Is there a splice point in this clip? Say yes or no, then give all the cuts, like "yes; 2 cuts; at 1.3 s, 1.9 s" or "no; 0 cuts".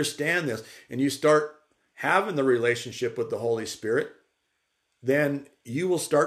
no; 0 cuts